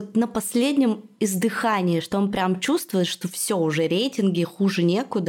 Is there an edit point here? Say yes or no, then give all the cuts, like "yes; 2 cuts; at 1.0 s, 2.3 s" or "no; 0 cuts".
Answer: no; 0 cuts